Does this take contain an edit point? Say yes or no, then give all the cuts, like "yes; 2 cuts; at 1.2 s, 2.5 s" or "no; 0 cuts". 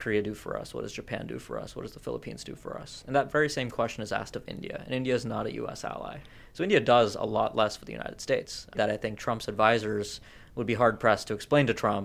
yes; 1 cut; at 8.7 s